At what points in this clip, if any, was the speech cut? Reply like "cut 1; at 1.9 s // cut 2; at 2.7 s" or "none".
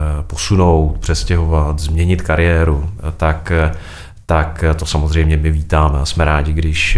none